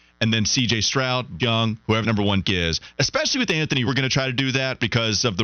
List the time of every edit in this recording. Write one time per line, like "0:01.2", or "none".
0:01.4
0:02.0
0:02.4
0:03.9